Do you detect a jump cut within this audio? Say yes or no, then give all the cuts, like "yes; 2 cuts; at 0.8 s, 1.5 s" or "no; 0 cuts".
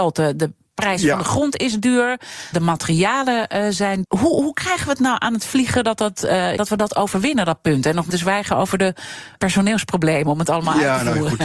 yes; 5 cuts; at 2.5 s, 4.0 s, 6.6 s, 8.1 s, 9.4 s